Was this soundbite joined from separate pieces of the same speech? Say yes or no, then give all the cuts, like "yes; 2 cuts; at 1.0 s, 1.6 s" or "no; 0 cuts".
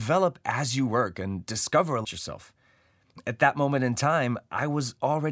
yes; 1 cut; at 2.0 s